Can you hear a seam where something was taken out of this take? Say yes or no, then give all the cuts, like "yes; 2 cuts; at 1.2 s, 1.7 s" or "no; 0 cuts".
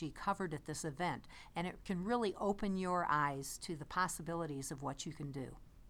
no; 0 cuts